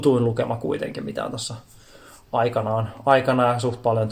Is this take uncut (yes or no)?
yes